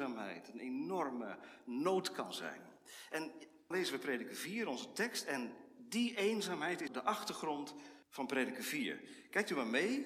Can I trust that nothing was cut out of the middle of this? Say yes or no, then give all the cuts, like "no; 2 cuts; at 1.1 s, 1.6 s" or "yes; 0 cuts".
no; 3 cuts; at 3.7 s, 6.9 s, 8.0 s